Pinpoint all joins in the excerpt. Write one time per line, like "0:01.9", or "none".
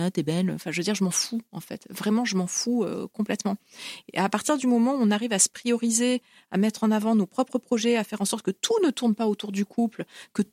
none